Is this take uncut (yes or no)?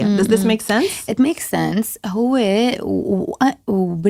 yes